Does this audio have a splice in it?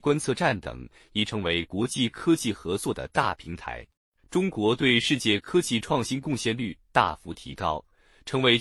yes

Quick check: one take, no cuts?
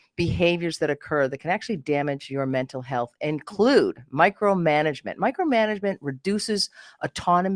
yes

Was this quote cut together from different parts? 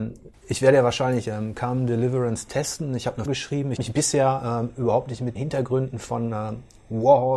yes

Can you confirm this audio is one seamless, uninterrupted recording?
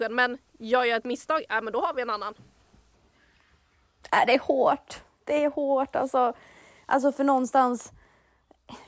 yes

